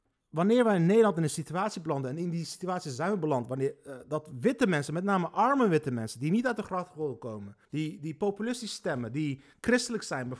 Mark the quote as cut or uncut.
cut